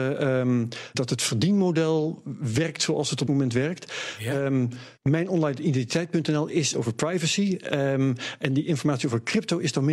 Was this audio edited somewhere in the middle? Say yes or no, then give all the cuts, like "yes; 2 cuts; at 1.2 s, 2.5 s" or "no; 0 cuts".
yes; 4 cuts; at 0.9 s, 3.3 s, 5.0 s, 6.7 s